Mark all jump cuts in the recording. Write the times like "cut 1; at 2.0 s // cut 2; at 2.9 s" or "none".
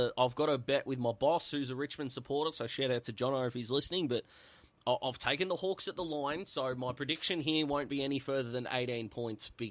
none